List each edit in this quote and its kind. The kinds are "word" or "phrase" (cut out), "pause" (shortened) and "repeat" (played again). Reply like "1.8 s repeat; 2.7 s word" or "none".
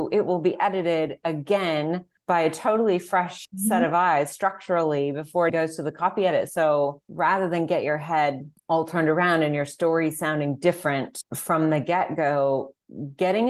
5.5 s word